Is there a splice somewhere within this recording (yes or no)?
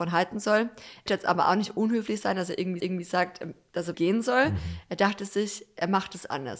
yes